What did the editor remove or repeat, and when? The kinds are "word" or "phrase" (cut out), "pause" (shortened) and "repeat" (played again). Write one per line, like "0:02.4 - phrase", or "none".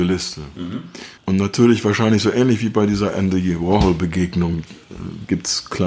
0:01.2 - pause